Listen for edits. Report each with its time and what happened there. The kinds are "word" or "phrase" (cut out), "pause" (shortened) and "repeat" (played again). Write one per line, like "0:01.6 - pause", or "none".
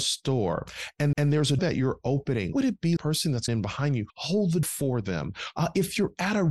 0:01.1 - repeat
0:01.6 - word
0:02.5 - word
0:03.0 - phrase
0:03.5 - word
0:04.1 - pause
0:04.6 - word